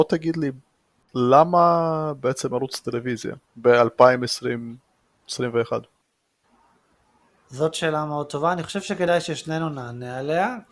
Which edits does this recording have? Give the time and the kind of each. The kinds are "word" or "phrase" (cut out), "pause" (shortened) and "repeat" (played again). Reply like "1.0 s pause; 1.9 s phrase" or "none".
3.5 s pause